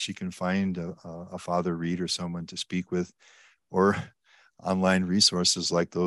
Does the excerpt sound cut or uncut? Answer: uncut